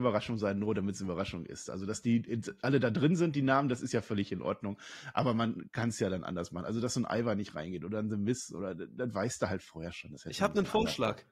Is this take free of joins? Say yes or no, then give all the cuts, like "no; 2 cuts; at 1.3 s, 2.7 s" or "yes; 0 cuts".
yes; 0 cuts